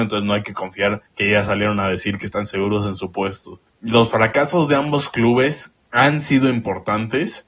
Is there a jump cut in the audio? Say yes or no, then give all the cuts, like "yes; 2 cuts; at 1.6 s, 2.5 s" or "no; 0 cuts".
yes; 3 cuts; at 1.1 s, 3.7 s, 5.8 s